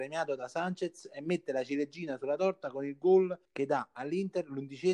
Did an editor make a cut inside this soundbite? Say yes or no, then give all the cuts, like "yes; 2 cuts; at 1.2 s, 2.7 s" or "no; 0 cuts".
yes; 1 cut; at 3.4 s